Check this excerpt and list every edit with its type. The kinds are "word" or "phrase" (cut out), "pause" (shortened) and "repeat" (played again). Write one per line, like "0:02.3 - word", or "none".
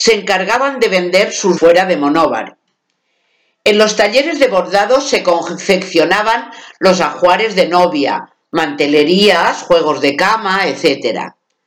0:01.6 - word